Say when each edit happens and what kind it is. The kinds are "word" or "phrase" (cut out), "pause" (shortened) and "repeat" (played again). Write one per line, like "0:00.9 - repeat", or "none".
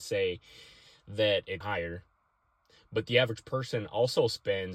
0:01.6 - word